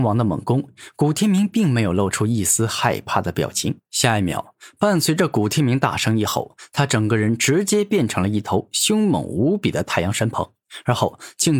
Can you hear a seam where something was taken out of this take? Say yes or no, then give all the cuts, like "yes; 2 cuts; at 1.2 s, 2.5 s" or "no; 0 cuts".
yes; 1 cut; at 3.9 s